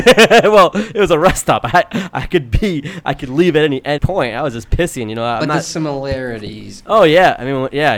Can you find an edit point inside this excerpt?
yes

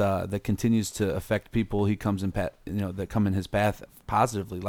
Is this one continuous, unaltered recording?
yes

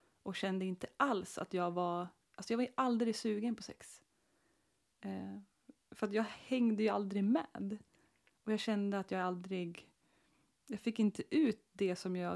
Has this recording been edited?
no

